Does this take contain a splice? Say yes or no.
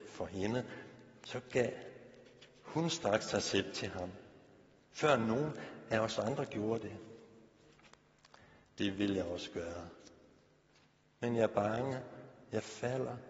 no